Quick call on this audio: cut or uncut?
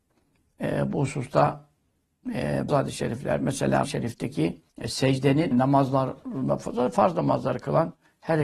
cut